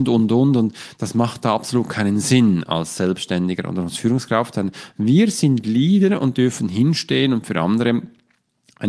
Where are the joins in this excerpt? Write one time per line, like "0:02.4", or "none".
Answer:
none

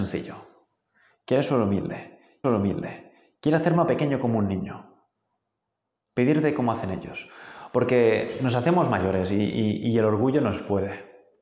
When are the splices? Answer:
0:02.4

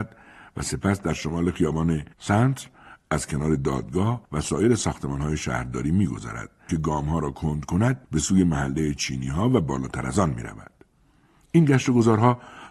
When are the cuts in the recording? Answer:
0:04.2
0:06.7
0:08.0

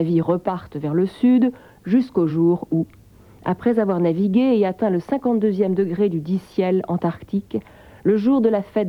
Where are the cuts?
none

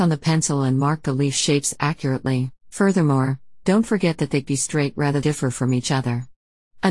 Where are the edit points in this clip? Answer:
0:02.6
0:04.4
0:05.2

